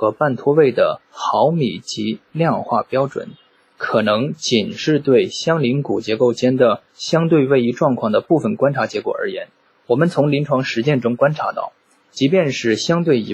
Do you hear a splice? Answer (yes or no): yes